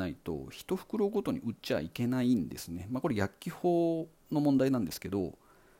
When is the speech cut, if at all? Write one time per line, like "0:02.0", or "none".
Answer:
none